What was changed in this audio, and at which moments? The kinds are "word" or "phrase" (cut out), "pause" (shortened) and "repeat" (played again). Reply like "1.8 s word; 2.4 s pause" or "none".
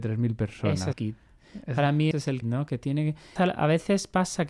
0.9 s word; 2.1 s word; 2.4 s word; 3.4 s word